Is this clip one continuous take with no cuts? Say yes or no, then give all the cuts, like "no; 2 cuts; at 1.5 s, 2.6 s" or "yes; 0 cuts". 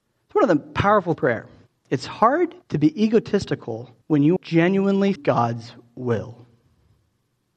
no; 6 cuts; at 1.1 s, 1.7 s, 2.6 s, 4.0 s, 4.4 s, 5.2 s